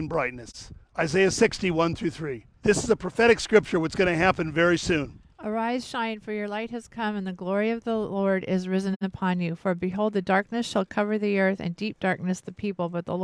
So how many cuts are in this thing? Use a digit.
2